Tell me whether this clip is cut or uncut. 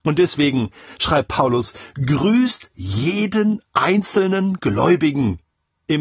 uncut